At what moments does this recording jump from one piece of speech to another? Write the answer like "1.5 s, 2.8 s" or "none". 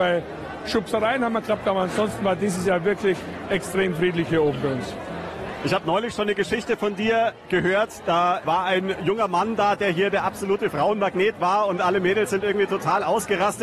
none